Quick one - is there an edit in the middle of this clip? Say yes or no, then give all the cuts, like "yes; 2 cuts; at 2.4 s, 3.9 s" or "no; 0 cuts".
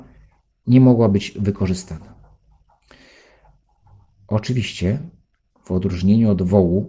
no; 0 cuts